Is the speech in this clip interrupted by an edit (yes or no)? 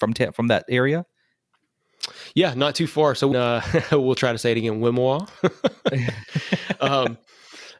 yes